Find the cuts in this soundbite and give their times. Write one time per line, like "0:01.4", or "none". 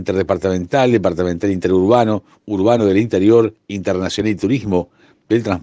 none